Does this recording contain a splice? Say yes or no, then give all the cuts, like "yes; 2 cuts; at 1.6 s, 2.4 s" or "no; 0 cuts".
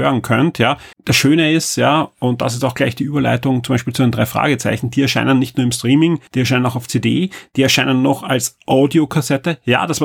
yes; 2 cuts; at 0.9 s, 6.3 s